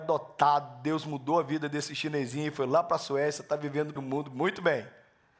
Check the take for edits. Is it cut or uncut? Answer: cut